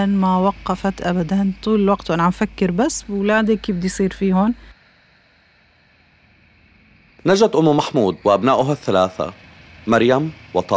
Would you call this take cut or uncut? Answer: cut